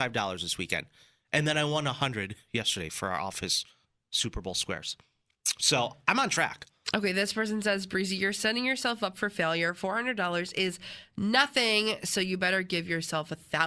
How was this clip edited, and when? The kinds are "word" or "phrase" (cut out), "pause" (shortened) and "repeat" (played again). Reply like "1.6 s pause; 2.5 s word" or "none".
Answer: none